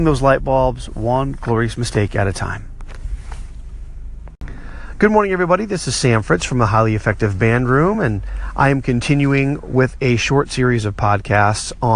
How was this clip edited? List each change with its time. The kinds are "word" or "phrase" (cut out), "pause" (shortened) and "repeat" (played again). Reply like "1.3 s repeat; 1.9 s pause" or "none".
none